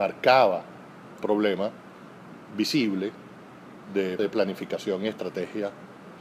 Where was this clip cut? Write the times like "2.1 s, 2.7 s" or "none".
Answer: 1.2 s, 4.2 s